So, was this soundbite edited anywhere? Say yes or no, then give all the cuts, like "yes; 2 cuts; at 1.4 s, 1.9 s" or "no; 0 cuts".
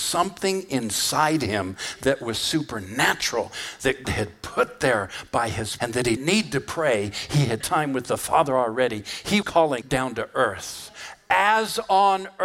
yes; 6 cuts; at 4.0 s, 5.8 s, 6.2 s, 7.6 s, 9.4 s, 9.8 s